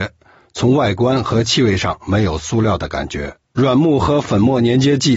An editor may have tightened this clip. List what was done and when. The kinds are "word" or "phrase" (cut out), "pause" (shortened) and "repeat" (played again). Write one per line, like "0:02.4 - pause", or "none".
0:03.4 - pause

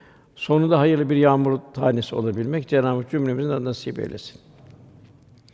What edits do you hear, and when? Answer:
none

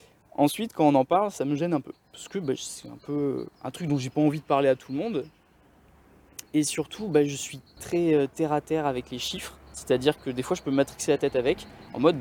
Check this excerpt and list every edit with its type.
0:02.0 - pause
0:03.5 - pause
0:06.5 - pause
0:07.8 - word
0:09.6 - pause

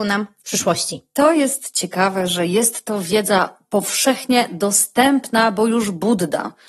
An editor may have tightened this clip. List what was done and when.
none

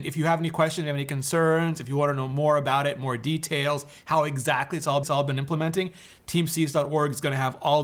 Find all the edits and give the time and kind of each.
0:05.0 - repeat

